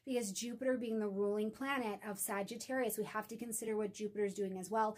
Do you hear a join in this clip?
no; 0 cuts

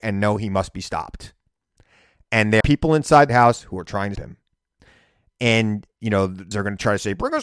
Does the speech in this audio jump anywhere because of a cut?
yes; 4 cuts; at 2.6 s, 3.3 s, 4.2 s, 6.5 s

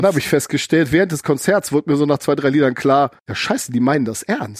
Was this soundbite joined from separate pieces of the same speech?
yes; 1 cut; at 3.2 s

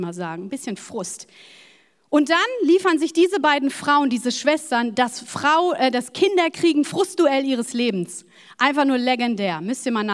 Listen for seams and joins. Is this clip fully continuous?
yes; 0 cuts

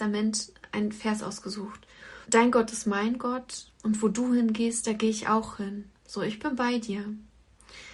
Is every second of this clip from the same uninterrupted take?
no; 2 cuts; at 2.2 s, 3.7 s

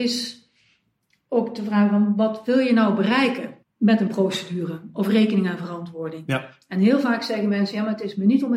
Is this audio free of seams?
no; 1 cut; at 3.6 s

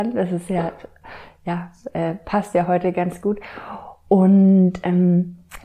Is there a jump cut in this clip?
no; 0 cuts

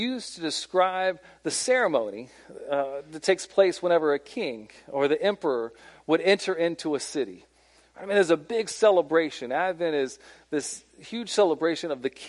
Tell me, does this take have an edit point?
no; 0 cuts

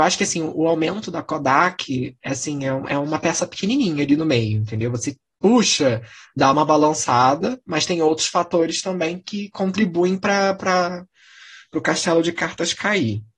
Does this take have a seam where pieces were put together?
no; 0 cuts

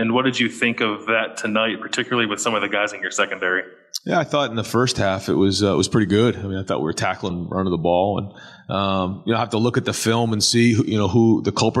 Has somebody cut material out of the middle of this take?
yes; 1 cut; at 7.3 s

